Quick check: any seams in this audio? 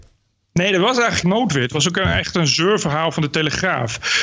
yes; 1 cut; at 1.2 s

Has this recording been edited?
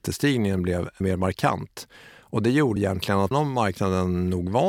yes; 3 cuts; at 1.0 s, 2.8 s, 3.3 s

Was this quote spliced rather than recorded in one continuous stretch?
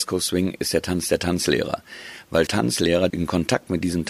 yes; 2 cuts; at 2.5 s, 3.1 s

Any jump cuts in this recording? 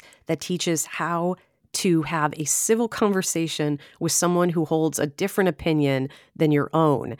no; 0 cuts

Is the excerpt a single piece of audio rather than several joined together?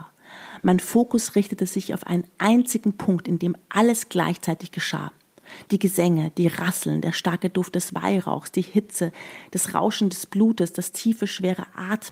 yes; 0 cuts

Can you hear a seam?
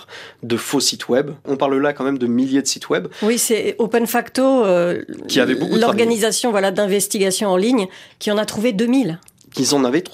no; 0 cuts

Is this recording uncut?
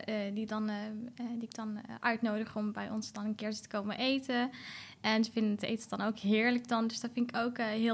yes; 0 cuts

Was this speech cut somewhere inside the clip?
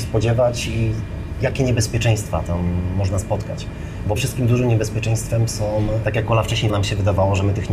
yes; 3 cuts; at 4.2 s, 6.0 s, 6.7 s

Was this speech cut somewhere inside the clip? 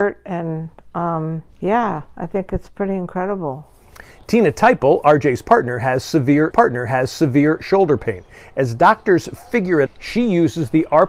yes; 3 cuts; at 1.5 s, 6.5 s, 9.9 s

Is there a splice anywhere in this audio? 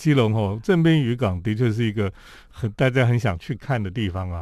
no; 0 cuts

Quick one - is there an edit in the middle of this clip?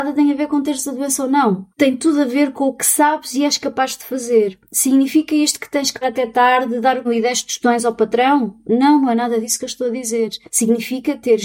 yes; 4 cuts; at 1.7 s, 6.0 s, 7.0 s, 10.5 s

